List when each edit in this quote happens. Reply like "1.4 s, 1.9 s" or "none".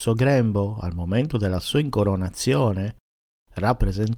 none